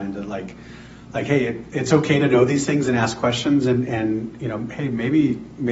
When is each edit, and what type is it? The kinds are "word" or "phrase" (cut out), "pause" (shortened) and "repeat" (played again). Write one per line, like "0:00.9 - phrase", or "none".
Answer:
none